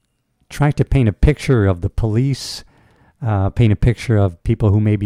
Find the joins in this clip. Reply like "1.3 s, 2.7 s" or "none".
none